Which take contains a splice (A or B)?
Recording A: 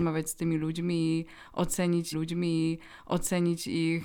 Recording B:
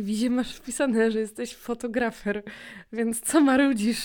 A